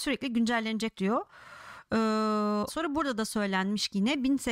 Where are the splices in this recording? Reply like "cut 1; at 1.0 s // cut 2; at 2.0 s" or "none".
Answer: cut 1; at 0.9 s // cut 2; at 2.7 s